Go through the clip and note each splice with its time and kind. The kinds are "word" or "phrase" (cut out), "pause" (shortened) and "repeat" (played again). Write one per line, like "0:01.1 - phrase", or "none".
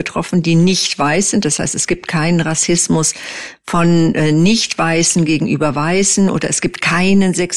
none